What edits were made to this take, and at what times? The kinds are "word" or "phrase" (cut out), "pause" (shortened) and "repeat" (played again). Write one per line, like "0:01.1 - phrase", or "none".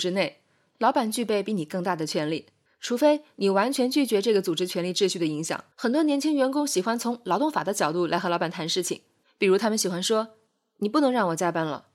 0:02.7 - pause
0:05.7 - pause
0:09.2 - pause
0:10.5 - pause